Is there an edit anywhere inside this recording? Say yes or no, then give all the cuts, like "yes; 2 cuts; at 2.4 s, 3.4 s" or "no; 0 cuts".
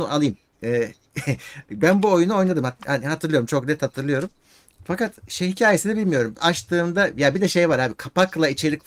no; 0 cuts